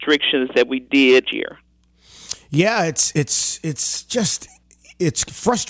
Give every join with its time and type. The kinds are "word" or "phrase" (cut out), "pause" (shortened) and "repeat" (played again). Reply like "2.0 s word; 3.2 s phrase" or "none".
1.3 s word